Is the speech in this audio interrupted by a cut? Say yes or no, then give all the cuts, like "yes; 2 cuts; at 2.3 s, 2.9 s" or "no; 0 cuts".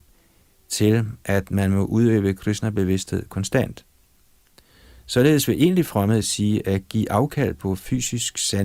no; 0 cuts